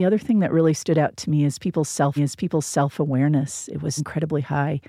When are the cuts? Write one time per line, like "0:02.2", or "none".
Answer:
0:02.2
0:04.0